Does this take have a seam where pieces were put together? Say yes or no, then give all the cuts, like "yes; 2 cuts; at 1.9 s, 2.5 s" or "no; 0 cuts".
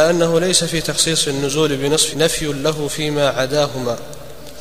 yes; 1 cut; at 2.1 s